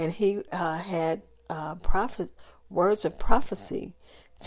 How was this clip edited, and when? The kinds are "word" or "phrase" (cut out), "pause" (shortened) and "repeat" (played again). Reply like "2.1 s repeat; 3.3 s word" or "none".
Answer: 1.4 s pause